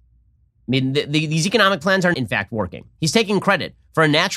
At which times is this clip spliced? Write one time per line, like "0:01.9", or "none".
0:02.1